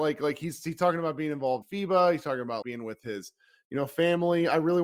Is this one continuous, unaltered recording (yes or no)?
no